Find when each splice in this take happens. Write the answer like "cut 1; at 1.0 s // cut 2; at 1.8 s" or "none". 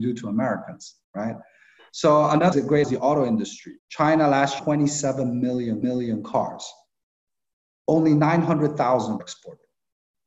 cut 1; at 1.0 s // cut 2; at 2.5 s // cut 3; at 2.8 s // cut 4; at 3.8 s // cut 5; at 4.6 s // cut 6; at 5.8 s // cut 7; at 9.2 s